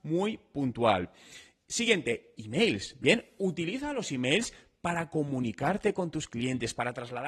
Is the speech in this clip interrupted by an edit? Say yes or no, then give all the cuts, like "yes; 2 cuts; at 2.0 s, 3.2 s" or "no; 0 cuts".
no; 0 cuts